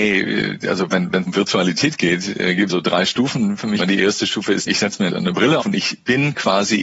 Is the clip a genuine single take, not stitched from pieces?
no; 6 cuts; at 1.2 s, 2.7 s, 3.8 s, 4.7 s, 5.1 s, 5.6 s

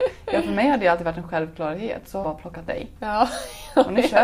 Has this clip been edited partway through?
yes; 2 cuts; at 2.2 s, 2.7 s

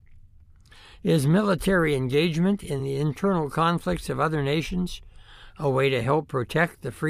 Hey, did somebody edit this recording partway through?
no; 0 cuts

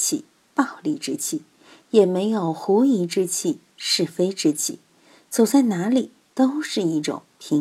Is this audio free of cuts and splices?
yes; 0 cuts

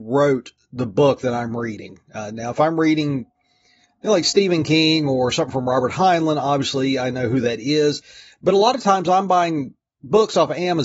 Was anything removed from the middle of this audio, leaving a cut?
no; 0 cuts

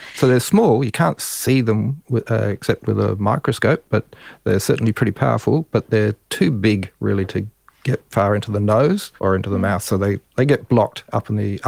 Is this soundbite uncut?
no; 2 cuts; at 8.1 s, 9.2 s

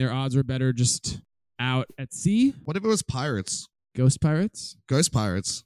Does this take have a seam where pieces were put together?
no; 0 cuts

